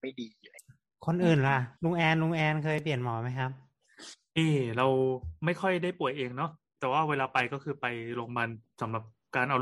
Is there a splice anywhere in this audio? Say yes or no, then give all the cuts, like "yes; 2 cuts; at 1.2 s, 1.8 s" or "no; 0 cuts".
yes; 1 cut; at 1.8 s